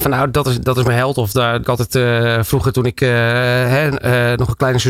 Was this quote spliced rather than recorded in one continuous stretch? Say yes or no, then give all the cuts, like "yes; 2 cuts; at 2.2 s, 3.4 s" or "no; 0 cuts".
yes; 1 cut; at 1.6 s